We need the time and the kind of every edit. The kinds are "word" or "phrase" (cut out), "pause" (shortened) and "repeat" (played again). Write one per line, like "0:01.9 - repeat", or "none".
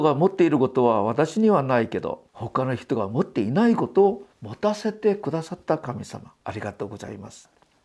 0:02.3 - pause
0:04.3 - pause
0:06.4 - pause